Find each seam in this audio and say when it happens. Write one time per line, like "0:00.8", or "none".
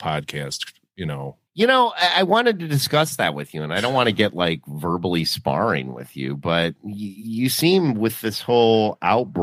0:01.5

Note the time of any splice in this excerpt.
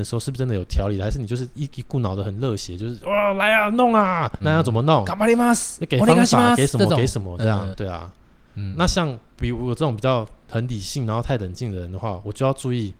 0:04.4
0:07.7
0:08.7

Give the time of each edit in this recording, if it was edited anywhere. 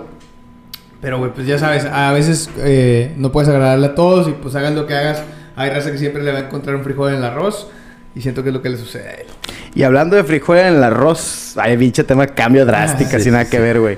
0:01.2

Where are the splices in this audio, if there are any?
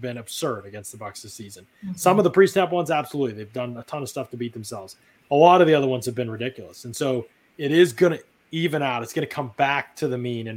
none

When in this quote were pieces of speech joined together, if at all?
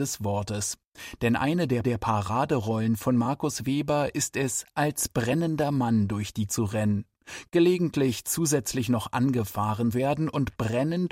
0:01.8
0:06.5
0:09.9

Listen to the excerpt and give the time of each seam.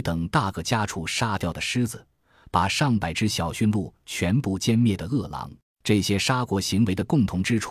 0:05.6

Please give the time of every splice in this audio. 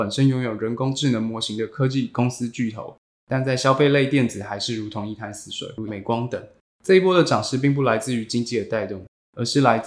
0:05.9

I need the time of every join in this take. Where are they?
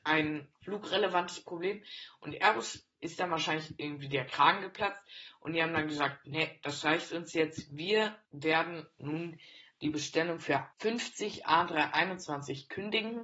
0:08.3
0:10.7

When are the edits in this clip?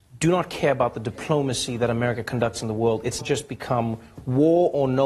0:03.2

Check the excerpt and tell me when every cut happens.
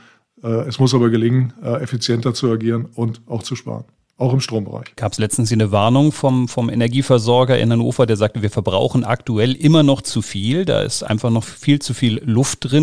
none

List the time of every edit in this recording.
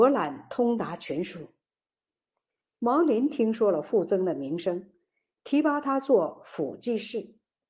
none

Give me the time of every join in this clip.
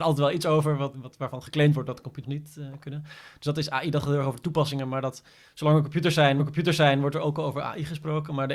0:00.9
0:02.2
0:06.4

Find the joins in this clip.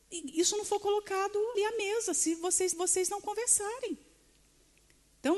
0:01.5
0:02.7

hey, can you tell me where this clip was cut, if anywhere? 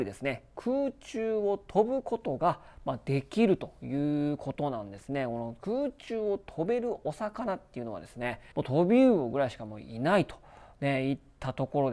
0:08.5

